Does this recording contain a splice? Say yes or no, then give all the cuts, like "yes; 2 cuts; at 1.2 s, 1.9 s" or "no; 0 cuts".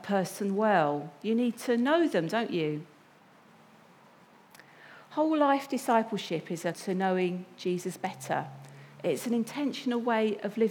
yes; 1 cut; at 6.7 s